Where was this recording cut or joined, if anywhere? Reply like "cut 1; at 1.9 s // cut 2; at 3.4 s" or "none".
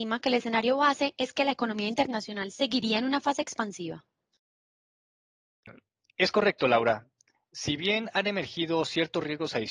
none